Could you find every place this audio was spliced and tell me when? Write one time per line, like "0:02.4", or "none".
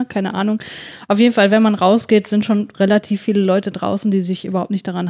none